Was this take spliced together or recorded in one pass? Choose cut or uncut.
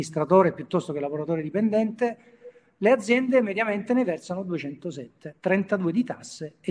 cut